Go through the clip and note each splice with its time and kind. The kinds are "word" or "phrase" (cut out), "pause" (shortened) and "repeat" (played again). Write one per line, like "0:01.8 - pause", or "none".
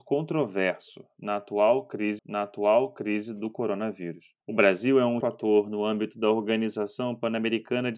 0:02.2 - repeat
0:04.4 - pause
0:05.2 - word